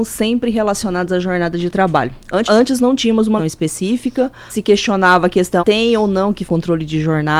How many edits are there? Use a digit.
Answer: 6